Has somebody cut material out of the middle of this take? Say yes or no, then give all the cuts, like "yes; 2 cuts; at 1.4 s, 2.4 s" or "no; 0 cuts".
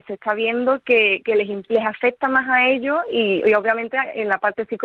no; 0 cuts